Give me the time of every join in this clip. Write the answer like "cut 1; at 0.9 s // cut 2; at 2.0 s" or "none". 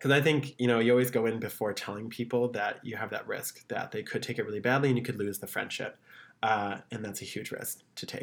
none